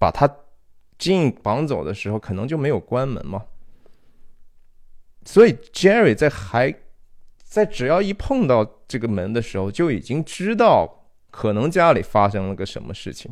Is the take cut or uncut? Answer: uncut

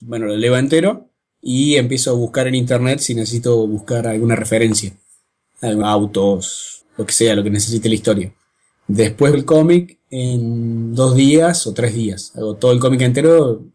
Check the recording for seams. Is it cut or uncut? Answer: cut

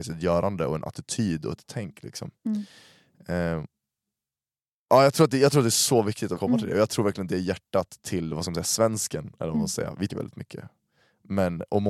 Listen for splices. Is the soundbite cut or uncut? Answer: cut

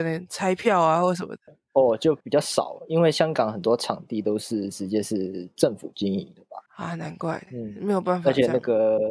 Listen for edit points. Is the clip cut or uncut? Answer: cut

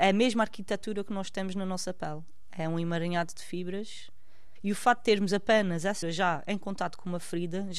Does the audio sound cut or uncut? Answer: cut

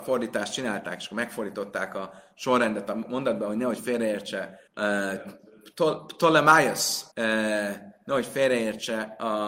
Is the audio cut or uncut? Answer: cut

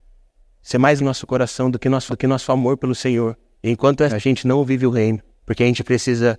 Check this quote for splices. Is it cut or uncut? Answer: cut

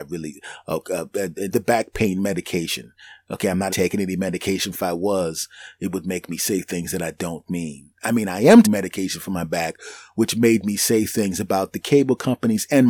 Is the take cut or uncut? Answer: cut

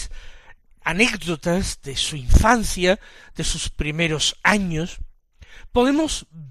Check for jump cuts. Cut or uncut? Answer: uncut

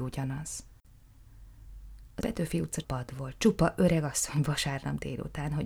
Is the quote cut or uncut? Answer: cut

